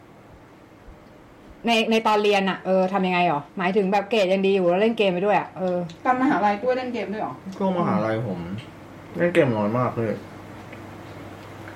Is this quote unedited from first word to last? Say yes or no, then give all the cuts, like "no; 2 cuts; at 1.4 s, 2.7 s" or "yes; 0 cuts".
no; 1 cut; at 3.5 s